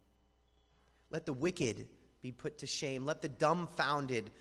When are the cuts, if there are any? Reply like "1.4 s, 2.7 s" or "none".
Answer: none